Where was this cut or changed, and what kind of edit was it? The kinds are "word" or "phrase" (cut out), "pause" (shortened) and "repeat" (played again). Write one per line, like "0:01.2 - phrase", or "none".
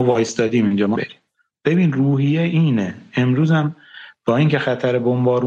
0:00.9 - word
0:01.3 - pause